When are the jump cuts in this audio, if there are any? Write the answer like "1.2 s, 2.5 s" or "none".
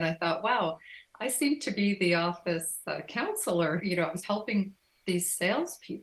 3.8 s, 4.2 s